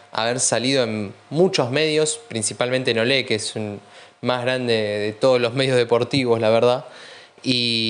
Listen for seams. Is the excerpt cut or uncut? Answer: uncut